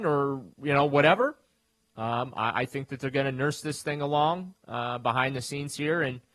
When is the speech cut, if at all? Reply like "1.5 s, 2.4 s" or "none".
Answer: none